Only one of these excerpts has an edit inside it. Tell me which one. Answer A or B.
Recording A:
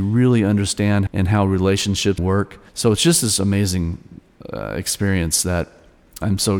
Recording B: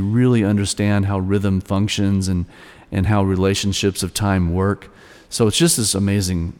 A